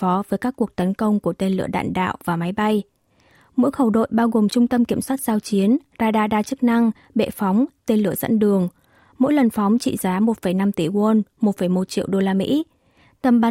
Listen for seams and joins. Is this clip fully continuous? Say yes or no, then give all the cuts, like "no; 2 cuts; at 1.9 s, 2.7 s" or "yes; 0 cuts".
yes; 0 cuts